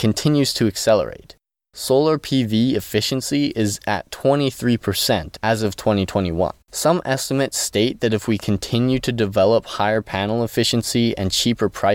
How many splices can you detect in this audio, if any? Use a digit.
1